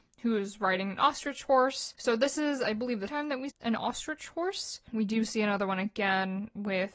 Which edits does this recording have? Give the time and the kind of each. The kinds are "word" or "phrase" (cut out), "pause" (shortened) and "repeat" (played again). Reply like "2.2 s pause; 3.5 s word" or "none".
3.1 s word; 3.5 s word